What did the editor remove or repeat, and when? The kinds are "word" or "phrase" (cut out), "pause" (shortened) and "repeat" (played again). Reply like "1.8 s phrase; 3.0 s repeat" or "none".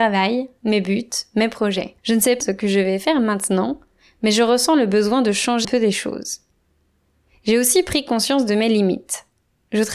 2.0 s pause; 2.4 s phrase; 5.6 s word